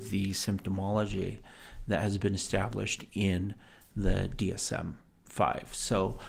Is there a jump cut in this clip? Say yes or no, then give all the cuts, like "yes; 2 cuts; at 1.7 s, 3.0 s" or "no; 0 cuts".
no; 0 cuts